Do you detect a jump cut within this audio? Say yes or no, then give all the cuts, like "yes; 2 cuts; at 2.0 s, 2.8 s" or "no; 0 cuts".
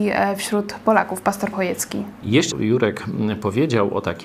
yes; 2 cuts; at 1.5 s, 2.5 s